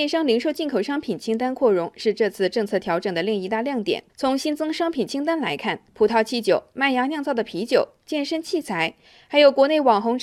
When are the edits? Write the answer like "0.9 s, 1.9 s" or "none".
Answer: 4.1 s, 5.9 s